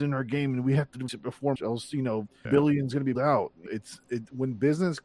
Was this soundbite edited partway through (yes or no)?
yes